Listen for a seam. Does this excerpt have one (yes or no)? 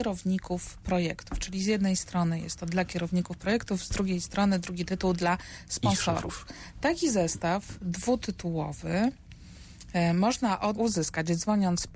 yes